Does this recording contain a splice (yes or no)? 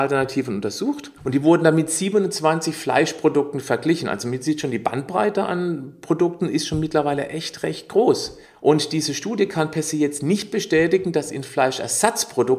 yes